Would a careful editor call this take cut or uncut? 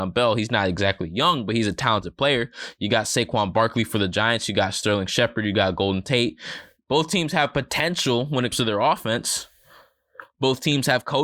cut